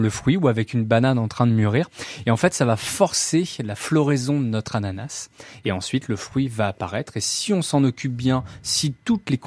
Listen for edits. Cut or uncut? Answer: uncut